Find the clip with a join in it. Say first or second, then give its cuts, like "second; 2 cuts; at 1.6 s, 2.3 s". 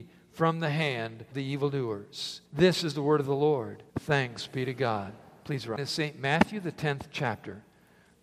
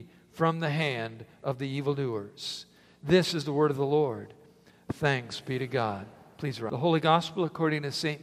first; 4 cuts; at 1.3 s, 2.4 s, 3.9 s, 5.8 s